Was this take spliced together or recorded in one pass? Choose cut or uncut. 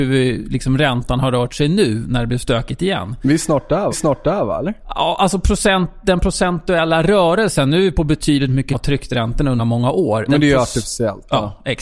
cut